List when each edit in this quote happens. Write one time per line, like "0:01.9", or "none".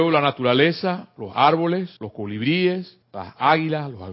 0:02.0
0:03.0